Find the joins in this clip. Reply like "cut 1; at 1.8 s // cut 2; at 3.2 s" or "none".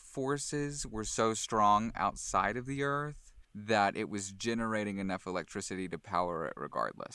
cut 1; at 3.4 s